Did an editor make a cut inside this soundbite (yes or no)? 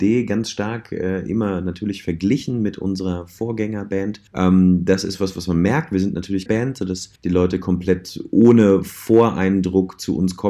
yes